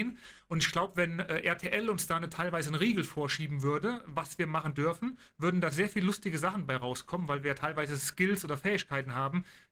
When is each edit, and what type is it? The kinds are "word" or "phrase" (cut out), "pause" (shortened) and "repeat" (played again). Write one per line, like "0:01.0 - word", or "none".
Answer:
none